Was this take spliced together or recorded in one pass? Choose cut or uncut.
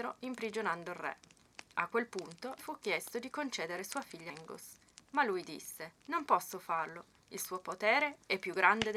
cut